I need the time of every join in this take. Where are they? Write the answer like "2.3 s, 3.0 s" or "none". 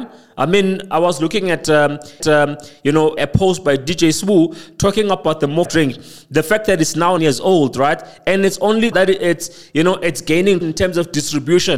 2.2 s, 3.2 s, 5.6 s, 7.2 s, 8.9 s, 10.6 s